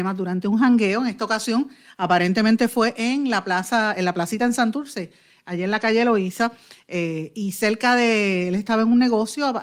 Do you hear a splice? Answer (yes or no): no